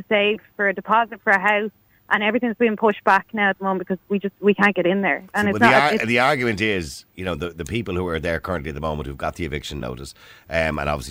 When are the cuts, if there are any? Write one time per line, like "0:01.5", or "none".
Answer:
none